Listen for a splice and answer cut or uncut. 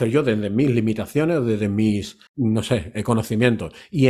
cut